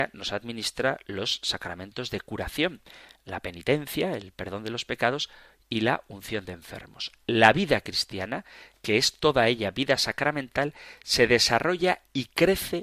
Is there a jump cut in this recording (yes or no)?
no